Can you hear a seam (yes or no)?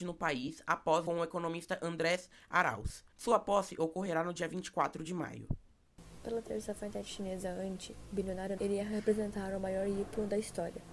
yes